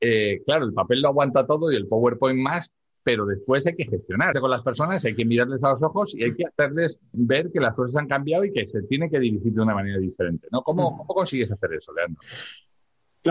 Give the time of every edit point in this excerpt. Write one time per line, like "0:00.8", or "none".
0:04.3
0:07.1